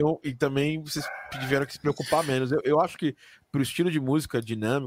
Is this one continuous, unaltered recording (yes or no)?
yes